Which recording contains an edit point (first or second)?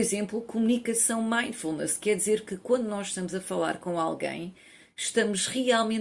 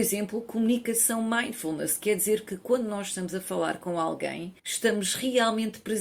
second